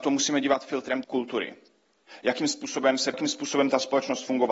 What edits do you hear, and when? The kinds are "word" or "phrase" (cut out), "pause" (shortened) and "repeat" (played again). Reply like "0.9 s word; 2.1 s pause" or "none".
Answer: 1.0 s word; 3.1 s word

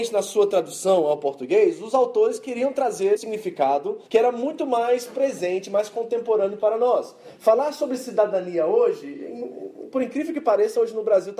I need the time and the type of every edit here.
3.2 s word; 4.1 s pause

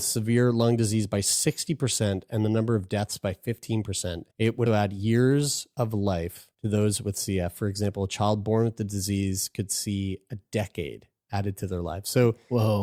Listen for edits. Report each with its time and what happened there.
4.3 s pause; 4.7 s word; 6.5 s pause

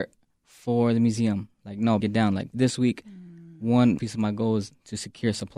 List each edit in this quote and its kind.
2.0 s word; 2.5 s word; 4.0 s word

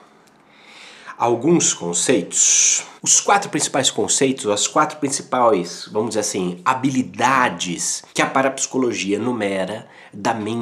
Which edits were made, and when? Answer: 3.0 s pause; 8.1 s pause

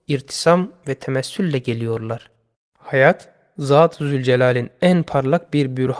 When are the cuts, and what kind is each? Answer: 2.5 s pause

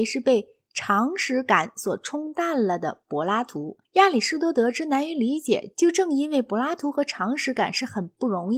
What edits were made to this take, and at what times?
3.9 s pause

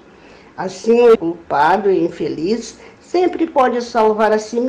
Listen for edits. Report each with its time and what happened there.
1.2 s word

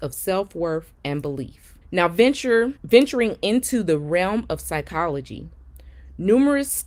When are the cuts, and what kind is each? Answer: 1.8 s pause; 2.8 s pause

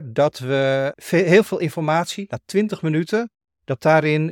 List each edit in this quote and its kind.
none

